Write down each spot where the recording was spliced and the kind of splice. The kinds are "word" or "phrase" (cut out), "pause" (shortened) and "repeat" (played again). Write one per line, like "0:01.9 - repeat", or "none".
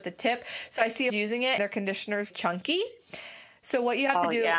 0:01.1 - phrase
0:01.6 - word
0:02.3 - word